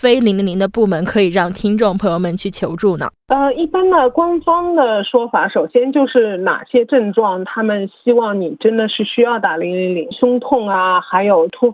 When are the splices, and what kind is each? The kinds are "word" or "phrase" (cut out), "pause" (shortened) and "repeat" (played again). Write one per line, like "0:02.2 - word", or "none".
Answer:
0:10.1 - phrase